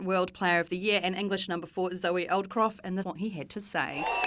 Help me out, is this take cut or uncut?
cut